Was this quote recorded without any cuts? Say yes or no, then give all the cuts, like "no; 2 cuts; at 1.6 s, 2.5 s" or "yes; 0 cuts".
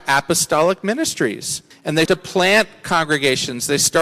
no; 2 cuts; at 1.7 s, 2.1 s